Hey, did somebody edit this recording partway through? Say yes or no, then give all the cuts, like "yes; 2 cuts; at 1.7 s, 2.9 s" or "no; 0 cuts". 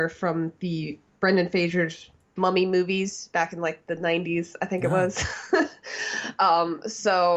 no; 0 cuts